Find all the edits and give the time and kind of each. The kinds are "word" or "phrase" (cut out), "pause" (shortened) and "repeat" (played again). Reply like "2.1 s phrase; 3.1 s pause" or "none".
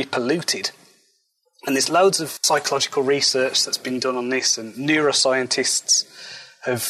none